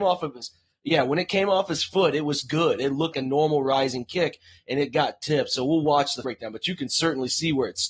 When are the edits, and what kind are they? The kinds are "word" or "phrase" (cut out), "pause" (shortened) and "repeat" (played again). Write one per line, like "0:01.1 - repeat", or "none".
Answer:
0:03.1 - word
0:06.2 - word